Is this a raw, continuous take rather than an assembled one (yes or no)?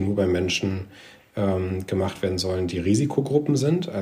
yes